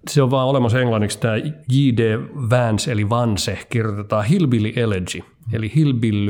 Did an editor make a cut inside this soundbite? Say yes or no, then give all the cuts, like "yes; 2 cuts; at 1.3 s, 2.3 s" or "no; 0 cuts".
yes; 1 cut; at 1.6 s